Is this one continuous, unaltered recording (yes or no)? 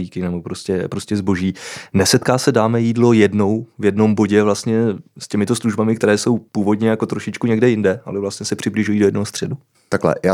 no